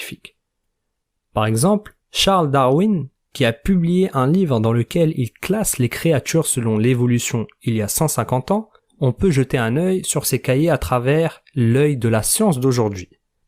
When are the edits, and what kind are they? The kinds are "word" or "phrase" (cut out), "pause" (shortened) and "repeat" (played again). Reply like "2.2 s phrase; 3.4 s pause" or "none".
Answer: 2.0 s pause; 8.8 s pause